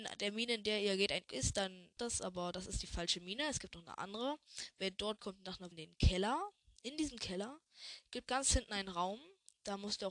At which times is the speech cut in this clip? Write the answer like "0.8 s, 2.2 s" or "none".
1.3 s, 2.0 s, 5.2 s, 5.7 s, 8.3 s